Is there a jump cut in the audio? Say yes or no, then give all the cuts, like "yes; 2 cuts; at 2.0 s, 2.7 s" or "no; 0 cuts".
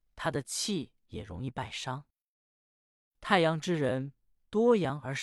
no; 0 cuts